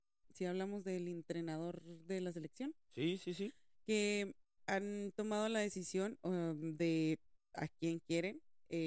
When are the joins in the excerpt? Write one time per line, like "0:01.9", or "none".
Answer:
none